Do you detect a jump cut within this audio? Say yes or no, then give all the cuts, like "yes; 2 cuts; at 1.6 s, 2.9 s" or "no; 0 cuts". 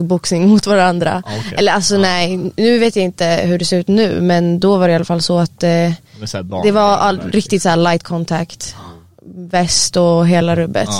no; 0 cuts